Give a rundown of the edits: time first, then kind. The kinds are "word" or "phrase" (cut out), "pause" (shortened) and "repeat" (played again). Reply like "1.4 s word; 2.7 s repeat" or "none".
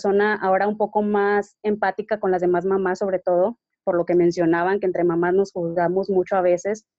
3.7 s pause